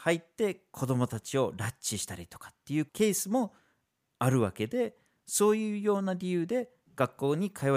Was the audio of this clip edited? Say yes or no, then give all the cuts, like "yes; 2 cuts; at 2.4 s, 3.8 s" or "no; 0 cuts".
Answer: no; 0 cuts